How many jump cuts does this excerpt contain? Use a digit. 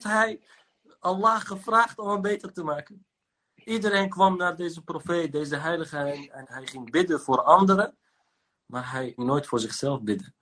2